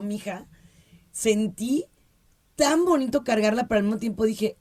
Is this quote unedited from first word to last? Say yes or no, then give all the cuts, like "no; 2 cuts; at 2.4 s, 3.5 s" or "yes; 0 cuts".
yes; 0 cuts